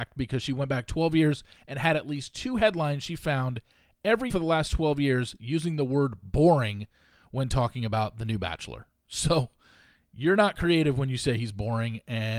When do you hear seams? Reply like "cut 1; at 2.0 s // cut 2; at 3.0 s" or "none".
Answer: cut 1; at 4.3 s